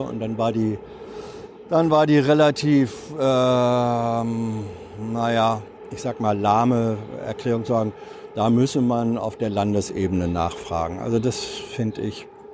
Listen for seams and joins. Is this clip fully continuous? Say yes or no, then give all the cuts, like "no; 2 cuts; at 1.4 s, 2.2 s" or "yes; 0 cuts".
yes; 0 cuts